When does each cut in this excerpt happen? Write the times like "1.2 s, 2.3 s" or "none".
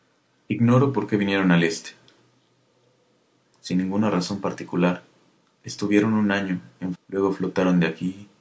6.9 s